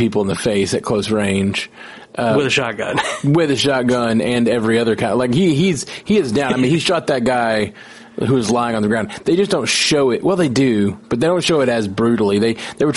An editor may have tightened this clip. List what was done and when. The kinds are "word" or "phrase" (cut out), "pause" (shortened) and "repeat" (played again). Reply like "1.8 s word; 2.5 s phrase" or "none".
none